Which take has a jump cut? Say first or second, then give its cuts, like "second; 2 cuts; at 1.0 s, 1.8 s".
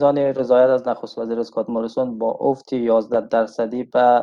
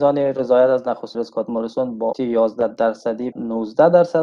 second; 3 cuts; at 1.1 s, 2.1 s, 3.3 s